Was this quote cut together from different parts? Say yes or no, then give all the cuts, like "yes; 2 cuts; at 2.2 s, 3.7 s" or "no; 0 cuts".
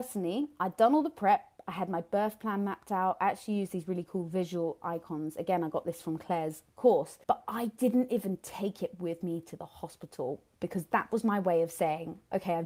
yes; 2 cuts; at 7.2 s, 10.5 s